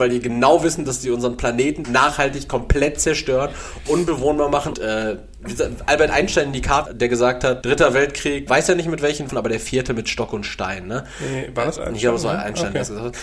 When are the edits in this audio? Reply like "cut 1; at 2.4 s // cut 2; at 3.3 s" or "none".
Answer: cut 1; at 1.8 s // cut 2; at 3.9 s // cut 3; at 4.7 s // cut 4; at 6.9 s // cut 5; at 7.6 s // cut 6; at 8.5 s // cut 7; at 9.3 s // cut 8; at 11.8 s